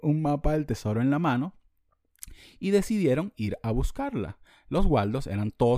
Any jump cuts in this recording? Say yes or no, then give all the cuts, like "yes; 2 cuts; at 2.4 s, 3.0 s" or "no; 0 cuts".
no; 0 cuts